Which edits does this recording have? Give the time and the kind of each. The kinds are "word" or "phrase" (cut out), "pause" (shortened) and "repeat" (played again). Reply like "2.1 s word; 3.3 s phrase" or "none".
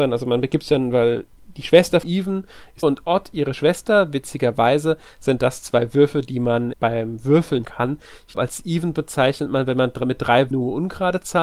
2.0 s phrase; 2.8 s phrase; 6.7 s word; 7.6 s word; 8.3 s word; 10.5 s word